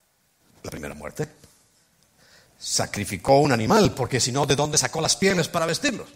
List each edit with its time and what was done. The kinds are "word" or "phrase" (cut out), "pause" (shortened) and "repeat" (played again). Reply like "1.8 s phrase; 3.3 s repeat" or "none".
none